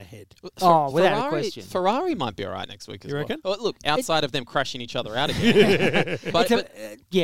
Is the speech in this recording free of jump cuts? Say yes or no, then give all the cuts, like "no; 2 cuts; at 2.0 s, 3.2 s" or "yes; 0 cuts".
yes; 0 cuts